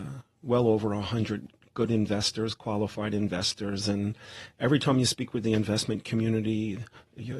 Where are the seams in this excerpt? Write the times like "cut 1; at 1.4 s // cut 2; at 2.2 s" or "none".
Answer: none